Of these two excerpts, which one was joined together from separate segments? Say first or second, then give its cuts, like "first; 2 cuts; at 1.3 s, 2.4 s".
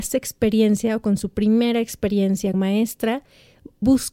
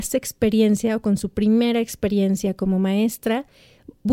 first; 1 cut; at 2.5 s